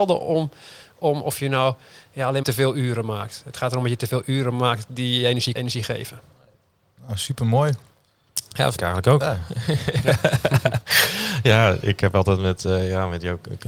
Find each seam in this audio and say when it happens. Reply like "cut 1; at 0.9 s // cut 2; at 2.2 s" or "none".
cut 1; at 2.4 s // cut 2; at 5.5 s // cut 3; at 8.7 s